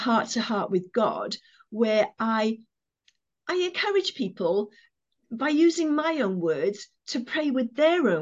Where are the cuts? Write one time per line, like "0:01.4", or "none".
none